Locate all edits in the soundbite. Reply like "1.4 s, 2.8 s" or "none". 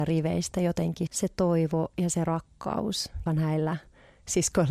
1.1 s, 3.3 s